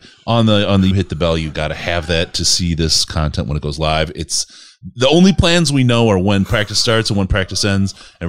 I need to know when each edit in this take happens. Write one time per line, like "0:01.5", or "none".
0:00.9
0:01.5